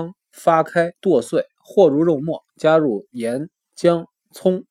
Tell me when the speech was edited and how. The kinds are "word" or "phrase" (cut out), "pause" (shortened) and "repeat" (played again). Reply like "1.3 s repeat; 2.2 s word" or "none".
1.0 s pause; 2.5 s pause